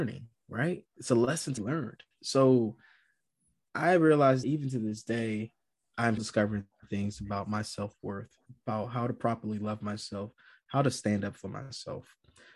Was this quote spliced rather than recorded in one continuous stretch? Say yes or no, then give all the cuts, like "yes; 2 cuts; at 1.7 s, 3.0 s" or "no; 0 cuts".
yes; 3 cuts; at 1.6 s, 4.4 s, 6.2 s